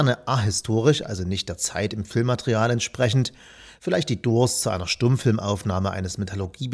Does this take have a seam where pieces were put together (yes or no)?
no